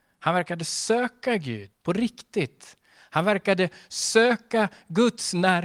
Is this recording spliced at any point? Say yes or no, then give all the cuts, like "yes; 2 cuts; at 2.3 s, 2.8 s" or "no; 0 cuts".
yes; 1 cut; at 1.7 s